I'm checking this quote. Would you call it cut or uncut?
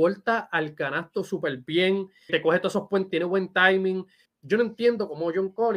cut